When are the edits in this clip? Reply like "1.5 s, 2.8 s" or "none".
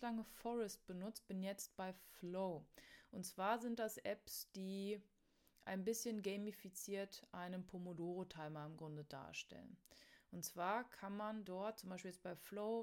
none